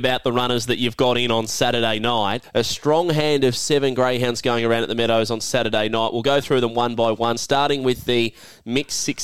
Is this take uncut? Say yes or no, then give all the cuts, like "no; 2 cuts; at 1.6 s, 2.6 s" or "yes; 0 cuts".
yes; 0 cuts